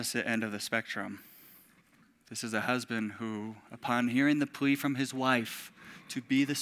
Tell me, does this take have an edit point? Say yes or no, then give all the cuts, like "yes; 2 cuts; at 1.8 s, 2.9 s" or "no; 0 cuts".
no; 0 cuts